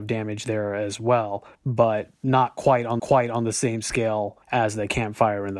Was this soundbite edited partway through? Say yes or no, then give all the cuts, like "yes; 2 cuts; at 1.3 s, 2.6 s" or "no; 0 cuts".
yes; 3 cuts; at 1.5 s, 3.0 s, 4.4 s